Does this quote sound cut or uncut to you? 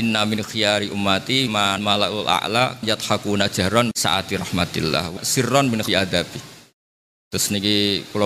cut